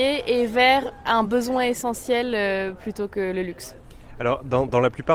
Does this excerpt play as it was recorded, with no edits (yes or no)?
yes